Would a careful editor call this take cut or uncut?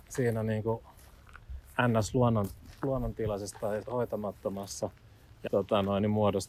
cut